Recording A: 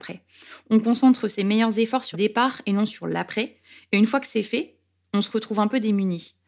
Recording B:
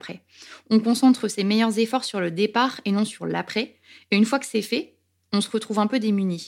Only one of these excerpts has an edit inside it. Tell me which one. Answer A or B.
A